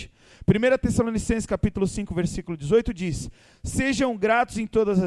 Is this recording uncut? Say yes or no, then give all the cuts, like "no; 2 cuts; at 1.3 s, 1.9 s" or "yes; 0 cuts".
yes; 0 cuts